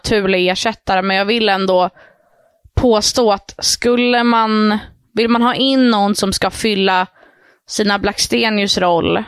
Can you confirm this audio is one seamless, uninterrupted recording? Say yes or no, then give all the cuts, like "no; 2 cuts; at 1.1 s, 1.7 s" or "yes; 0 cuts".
yes; 0 cuts